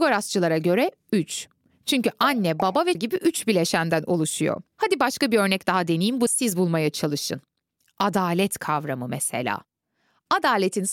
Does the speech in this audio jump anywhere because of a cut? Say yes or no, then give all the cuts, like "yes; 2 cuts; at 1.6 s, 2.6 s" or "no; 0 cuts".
yes; 3 cuts; at 2.9 s, 4.7 s, 6.3 s